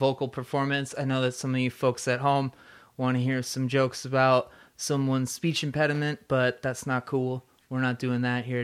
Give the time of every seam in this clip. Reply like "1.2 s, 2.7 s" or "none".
none